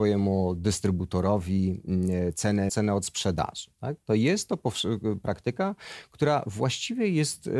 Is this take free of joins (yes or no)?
no